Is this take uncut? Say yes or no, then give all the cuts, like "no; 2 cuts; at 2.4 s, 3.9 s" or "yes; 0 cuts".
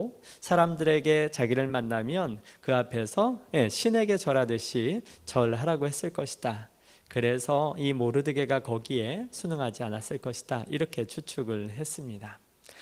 yes; 0 cuts